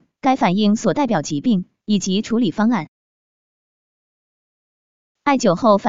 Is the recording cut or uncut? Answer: uncut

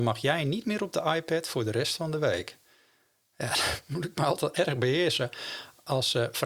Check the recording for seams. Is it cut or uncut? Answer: uncut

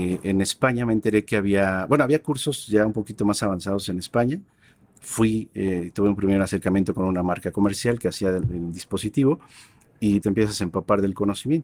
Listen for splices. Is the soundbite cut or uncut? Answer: cut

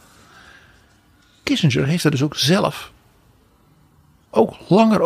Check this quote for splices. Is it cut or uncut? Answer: uncut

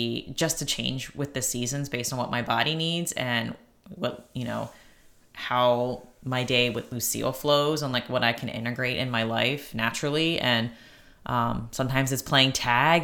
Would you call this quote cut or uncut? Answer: uncut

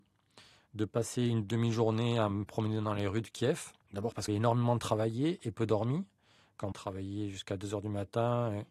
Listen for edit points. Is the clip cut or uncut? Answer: cut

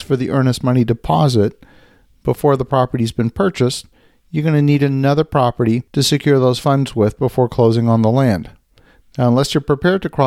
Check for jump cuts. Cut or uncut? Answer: uncut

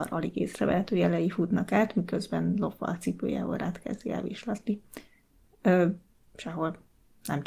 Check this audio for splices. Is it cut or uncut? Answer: uncut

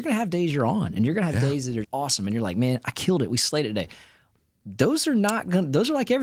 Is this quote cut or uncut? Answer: cut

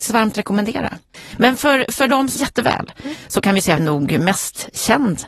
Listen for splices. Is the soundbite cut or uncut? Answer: cut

